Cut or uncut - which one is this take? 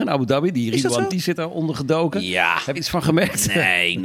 cut